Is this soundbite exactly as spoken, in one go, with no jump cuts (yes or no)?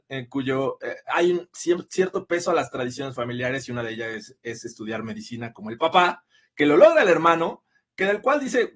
yes